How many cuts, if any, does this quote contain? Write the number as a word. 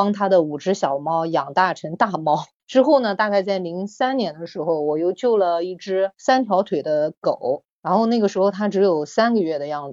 zero